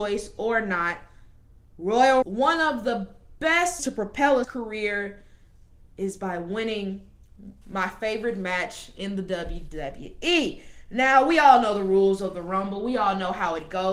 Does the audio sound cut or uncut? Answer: cut